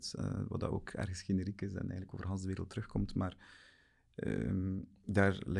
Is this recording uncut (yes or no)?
yes